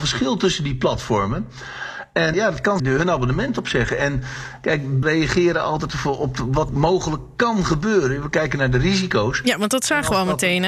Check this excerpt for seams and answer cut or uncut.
cut